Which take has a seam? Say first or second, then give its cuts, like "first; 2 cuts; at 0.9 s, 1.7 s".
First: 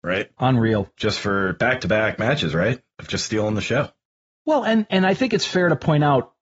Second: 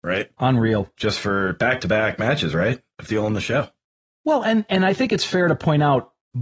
second; 1 cut; at 3.1 s